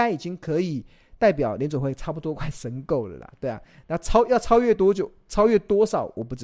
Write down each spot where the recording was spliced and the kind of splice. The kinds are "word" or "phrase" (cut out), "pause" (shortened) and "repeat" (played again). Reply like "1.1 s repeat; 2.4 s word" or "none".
none